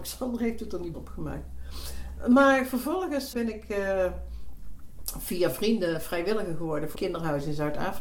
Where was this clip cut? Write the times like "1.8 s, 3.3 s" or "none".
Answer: 0.9 s, 3.3 s, 6.9 s